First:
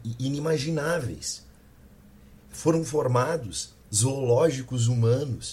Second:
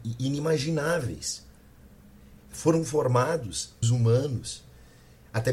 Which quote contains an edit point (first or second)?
second